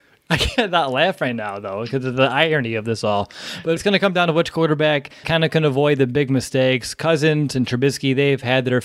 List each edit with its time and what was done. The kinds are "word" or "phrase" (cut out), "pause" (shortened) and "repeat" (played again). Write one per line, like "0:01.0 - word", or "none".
0:03.8 - word
0:05.2 - word